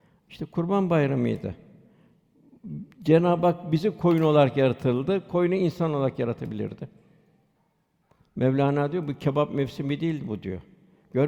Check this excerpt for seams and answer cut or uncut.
uncut